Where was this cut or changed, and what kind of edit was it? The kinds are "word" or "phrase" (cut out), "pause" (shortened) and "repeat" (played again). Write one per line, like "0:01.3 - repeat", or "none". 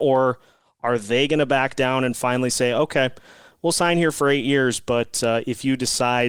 none